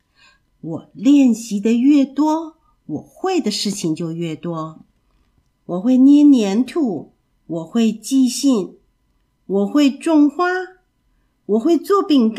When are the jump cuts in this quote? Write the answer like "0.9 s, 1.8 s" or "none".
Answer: 7.2 s